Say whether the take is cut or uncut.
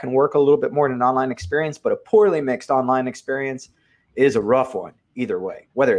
uncut